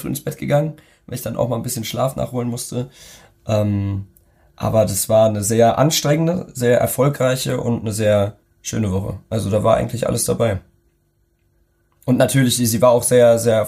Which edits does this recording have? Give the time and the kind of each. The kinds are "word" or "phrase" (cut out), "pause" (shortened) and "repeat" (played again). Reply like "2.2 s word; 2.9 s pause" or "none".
8.4 s pause